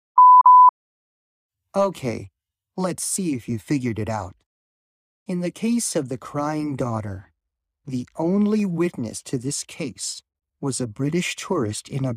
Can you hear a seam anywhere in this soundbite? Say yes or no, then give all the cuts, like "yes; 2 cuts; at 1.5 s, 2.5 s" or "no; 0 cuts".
no; 0 cuts